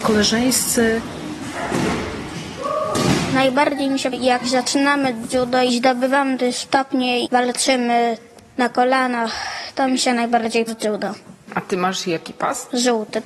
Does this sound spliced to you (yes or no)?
yes